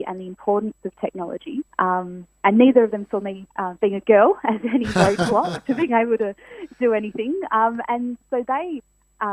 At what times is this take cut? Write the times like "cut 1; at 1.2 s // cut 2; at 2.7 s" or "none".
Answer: cut 1; at 1.7 s // cut 2; at 3.5 s